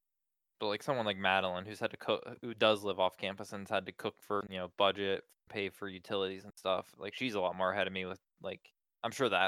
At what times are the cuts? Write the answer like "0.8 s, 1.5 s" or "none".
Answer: 4.4 s